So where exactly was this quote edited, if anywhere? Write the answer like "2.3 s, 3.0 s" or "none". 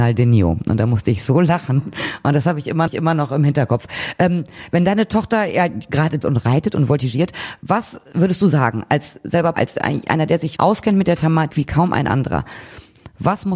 2.9 s, 6.2 s, 9.5 s, 10.6 s, 11.5 s